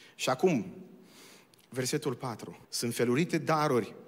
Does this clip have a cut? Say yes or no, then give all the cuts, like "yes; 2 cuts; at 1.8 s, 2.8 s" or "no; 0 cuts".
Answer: yes; 1 cut; at 2.6 s